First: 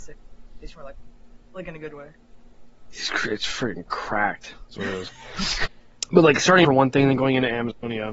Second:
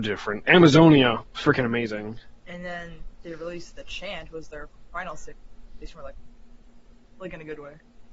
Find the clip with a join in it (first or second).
first